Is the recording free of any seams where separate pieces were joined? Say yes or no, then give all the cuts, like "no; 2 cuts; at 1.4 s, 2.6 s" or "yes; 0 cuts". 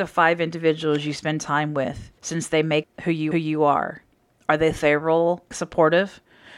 no; 4 cuts; at 2.2 s, 2.8 s, 3.3 s, 5.5 s